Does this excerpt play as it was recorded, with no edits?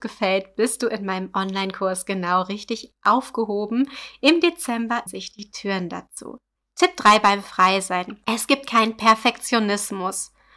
no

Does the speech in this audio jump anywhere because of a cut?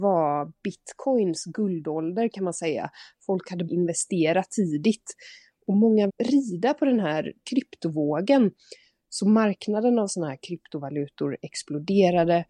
yes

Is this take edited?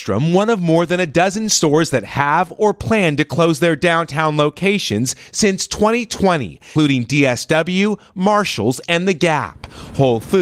yes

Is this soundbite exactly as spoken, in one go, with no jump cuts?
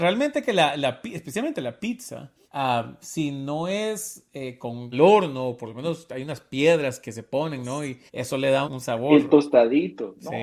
no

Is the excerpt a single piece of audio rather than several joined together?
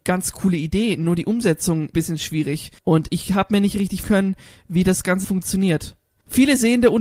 no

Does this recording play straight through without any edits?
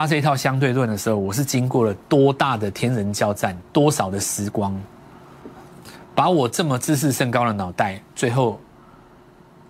yes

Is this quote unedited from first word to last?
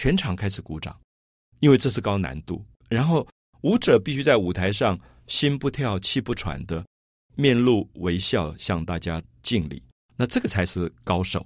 yes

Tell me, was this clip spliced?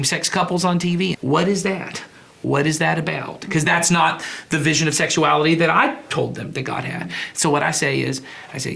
yes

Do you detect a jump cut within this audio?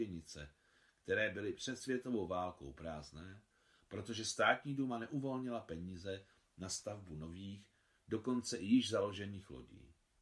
no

